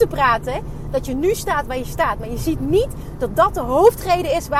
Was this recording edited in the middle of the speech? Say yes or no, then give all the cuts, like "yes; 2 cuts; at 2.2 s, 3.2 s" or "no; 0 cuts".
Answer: no; 0 cuts